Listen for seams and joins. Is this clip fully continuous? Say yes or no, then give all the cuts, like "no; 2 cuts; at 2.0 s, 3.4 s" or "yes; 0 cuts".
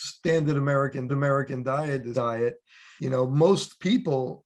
no; 3 cuts; at 1.1 s, 2.1 s, 3.0 s